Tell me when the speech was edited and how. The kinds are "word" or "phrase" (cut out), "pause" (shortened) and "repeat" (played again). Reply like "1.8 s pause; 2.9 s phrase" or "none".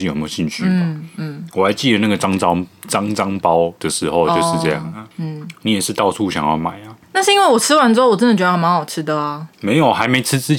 3.8 s pause; 5.1 s pause; 7.0 s pause; 9.5 s pause